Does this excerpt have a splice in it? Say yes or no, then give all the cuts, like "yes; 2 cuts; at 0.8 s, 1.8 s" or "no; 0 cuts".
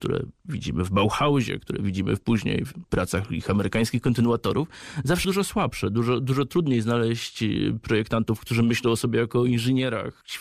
yes; 1 cut; at 5.2 s